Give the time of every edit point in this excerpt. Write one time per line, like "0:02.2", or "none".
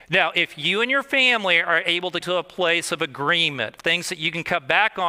0:02.2
0:03.8